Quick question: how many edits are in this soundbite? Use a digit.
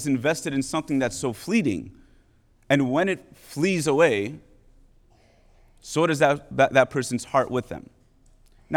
0